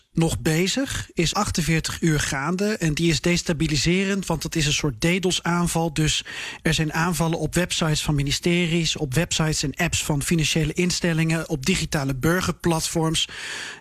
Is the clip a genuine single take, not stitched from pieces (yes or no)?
no